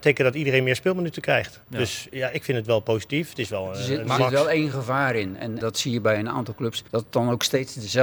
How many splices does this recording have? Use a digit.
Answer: 3